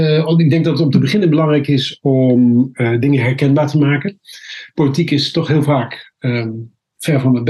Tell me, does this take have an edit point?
no; 0 cuts

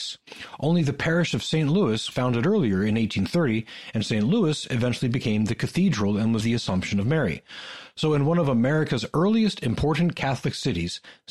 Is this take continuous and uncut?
no; 2 cuts; at 2.1 s, 6.4 s

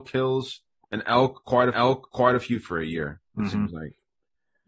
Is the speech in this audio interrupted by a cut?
yes; 3 cuts; at 1.7 s, 2.6 s, 3.3 s

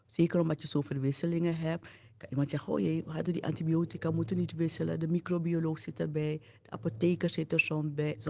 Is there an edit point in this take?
no; 0 cuts

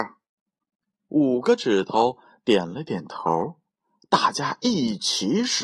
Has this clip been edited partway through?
no; 0 cuts

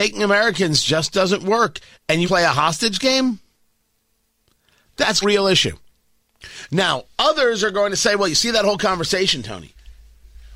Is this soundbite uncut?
no; 3 cuts; at 2.2 s, 5.2 s, 7.1 s

